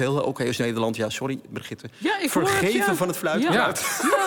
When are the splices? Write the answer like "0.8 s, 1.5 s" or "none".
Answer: none